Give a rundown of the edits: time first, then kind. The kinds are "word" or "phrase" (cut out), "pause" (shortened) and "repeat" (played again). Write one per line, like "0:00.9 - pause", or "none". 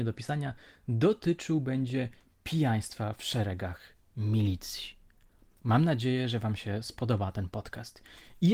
none